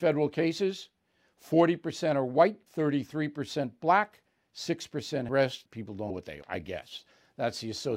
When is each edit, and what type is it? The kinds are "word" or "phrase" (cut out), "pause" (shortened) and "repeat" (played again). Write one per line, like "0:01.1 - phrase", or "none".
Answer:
0:02.7 - pause
0:05.3 - phrase
0:05.7 - word
0:06.1 - word
0:06.4 - word